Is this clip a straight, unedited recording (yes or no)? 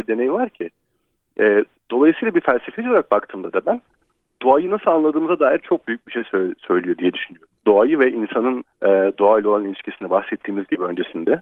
no